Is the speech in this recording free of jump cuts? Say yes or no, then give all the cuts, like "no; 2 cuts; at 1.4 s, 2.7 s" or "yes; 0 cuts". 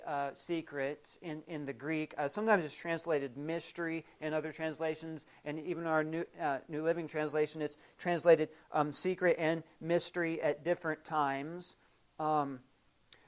yes; 0 cuts